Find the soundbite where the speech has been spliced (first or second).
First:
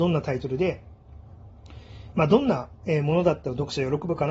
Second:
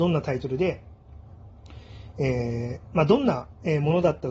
first